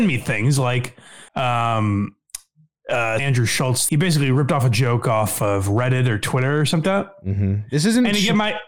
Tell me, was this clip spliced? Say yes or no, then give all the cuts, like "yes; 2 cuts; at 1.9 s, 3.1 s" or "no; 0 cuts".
yes; 4 cuts; at 1.3 s, 3.2 s, 3.9 s, 6.8 s